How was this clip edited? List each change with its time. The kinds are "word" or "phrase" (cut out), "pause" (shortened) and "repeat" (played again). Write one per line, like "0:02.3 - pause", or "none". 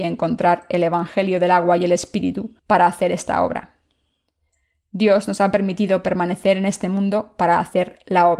0:02.6 - pause